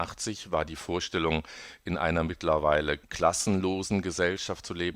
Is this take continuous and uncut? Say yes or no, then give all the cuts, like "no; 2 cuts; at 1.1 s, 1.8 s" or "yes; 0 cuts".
yes; 0 cuts